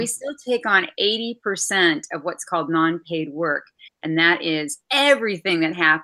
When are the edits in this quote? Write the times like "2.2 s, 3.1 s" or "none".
4.8 s